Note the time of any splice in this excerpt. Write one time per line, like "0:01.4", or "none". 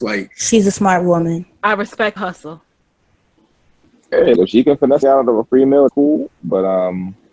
0:02.2
0:04.4
0:05.0
0:05.9